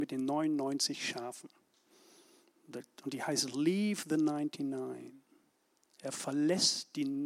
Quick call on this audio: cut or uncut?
uncut